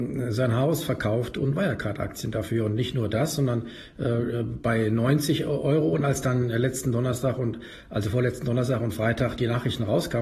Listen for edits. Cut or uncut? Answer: uncut